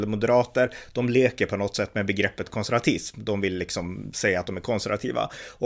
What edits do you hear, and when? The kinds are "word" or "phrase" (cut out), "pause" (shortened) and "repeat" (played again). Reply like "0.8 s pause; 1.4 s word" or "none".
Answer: none